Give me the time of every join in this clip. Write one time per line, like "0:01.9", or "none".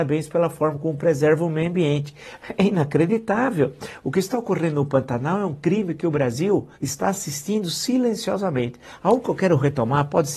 0:06.7

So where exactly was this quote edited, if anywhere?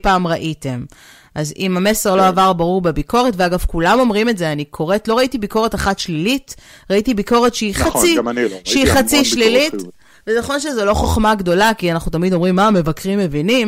none

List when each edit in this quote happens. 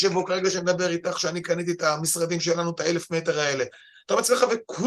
none

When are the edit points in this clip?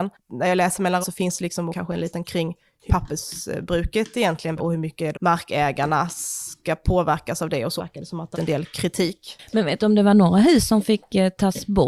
0:01.0
0:01.7
0:02.2
0:02.9
0:04.6
0:05.1
0:07.8
0:08.3

